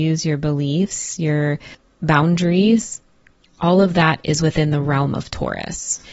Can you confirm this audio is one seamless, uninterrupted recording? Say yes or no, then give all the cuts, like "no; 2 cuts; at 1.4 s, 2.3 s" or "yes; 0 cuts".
yes; 0 cuts